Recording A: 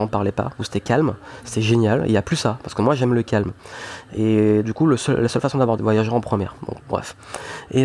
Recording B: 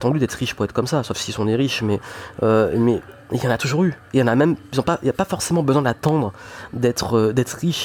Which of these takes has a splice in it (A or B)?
A